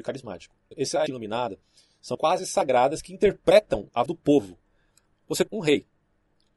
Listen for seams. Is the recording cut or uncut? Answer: cut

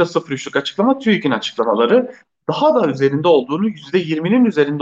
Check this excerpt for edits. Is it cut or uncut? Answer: uncut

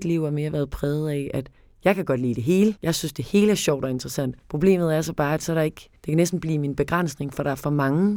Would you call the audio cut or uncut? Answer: cut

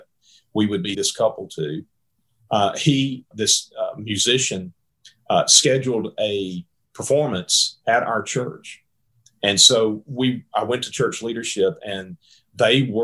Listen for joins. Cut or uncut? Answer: cut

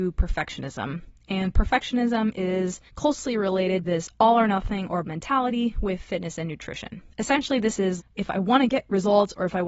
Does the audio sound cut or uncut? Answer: cut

